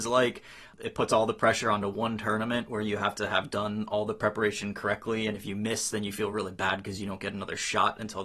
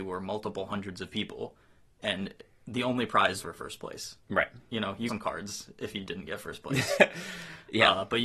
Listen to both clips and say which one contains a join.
second; 2 cuts; at 3.4 s, 5.1 s

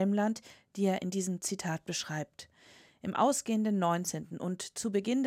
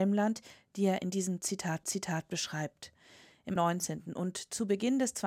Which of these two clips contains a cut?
second; 2 cuts; at 1.8 s, 3.6 s

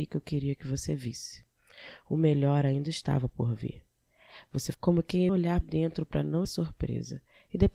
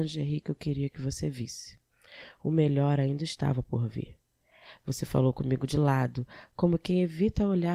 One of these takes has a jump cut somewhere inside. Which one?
first; 4 cuts; at 4.7 s, 5.3 s, 5.6 s, 6.4 s

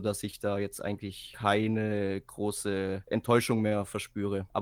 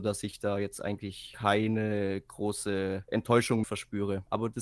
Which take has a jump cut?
second; 1 cut; at 3.6 s

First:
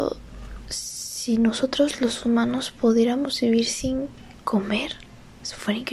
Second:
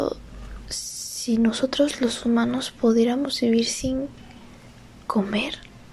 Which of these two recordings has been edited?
first; 1 cut; at 4.3 s

